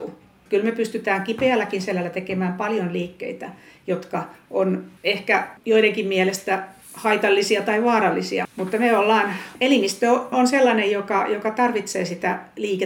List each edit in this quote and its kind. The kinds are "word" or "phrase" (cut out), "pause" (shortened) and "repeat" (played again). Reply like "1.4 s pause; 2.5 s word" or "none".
none